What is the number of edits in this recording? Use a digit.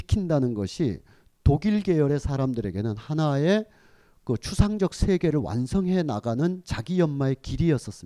0